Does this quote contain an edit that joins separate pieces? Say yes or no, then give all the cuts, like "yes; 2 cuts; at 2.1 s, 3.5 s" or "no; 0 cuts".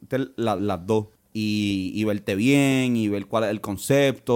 yes; 1 cut; at 1.2 s